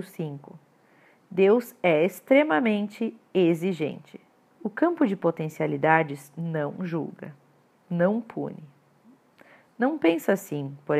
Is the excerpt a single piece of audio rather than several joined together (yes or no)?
no